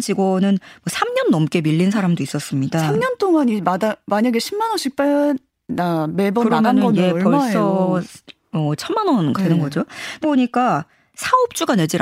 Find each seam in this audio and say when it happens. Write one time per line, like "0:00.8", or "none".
0:09.4
0:10.2